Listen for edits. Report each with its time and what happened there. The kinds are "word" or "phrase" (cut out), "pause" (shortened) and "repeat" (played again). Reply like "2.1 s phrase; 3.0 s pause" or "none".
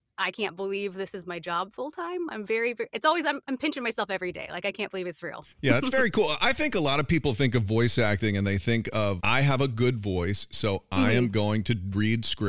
5.5 s pause; 9.2 s word